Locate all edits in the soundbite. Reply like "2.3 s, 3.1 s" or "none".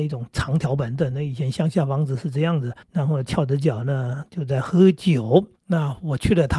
2.8 s, 5.6 s